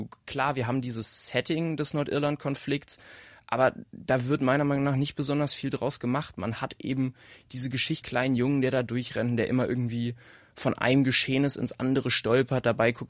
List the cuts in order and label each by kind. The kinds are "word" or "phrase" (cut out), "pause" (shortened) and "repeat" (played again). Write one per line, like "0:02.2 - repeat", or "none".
0:08.0 - word